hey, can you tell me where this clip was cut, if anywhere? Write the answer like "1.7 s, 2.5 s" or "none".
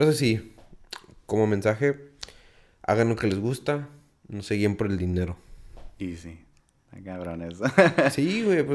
none